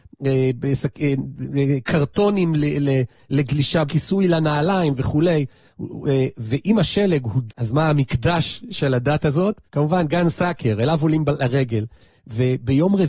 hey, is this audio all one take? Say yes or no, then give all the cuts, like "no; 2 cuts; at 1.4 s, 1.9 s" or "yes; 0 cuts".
no; 3 cuts; at 3.9 s, 7.5 s, 9.7 s